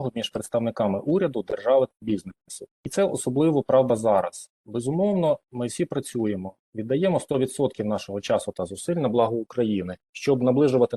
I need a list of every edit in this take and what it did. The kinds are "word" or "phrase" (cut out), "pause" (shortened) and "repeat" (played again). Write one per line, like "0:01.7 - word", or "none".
0:02.7 - pause
0:10.0 - pause